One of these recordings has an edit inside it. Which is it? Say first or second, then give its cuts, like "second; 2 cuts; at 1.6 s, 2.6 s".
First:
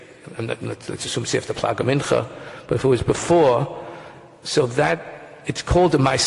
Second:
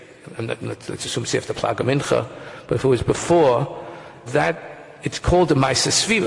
second; 1 cut; at 4.3 s